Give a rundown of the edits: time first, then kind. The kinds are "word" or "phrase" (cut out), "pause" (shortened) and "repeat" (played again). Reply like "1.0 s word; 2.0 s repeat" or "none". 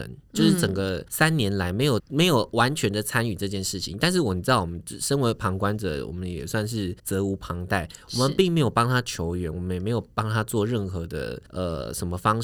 1.1 s pause; 2.0 s word; 7.0 s pause; 11.5 s pause